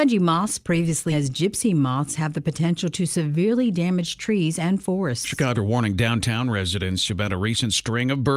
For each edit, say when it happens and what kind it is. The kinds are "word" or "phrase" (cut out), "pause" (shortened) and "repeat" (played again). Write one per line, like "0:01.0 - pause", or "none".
0:01.1 - word
0:05.5 - word